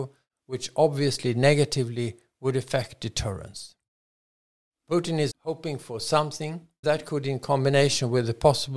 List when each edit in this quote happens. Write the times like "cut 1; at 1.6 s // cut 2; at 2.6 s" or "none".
cut 1; at 5.3 s // cut 2; at 6.8 s